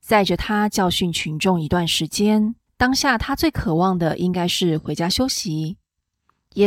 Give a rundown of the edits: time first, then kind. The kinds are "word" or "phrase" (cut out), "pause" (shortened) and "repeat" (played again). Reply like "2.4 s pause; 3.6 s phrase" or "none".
2.7 s pause